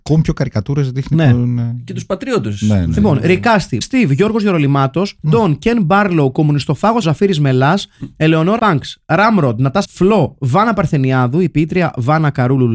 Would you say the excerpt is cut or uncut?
cut